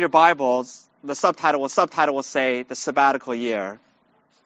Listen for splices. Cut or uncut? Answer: cut